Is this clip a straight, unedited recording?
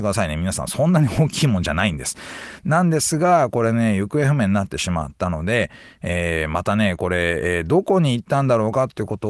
yes; 0 cuts

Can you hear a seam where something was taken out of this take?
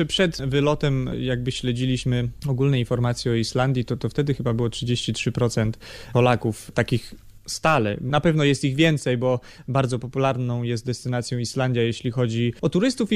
no; 0 cuts

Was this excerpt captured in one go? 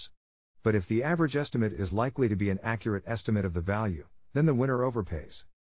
yes; 0 cuts

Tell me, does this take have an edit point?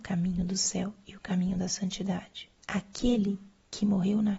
yes; 1 cut; at 2.6 s

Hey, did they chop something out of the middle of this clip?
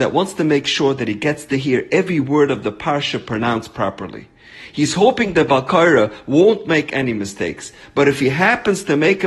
no; 0 cuts

